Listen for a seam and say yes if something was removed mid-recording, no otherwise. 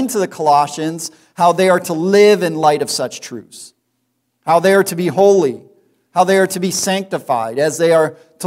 no